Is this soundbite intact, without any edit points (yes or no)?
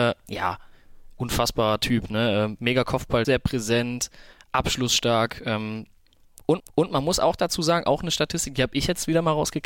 no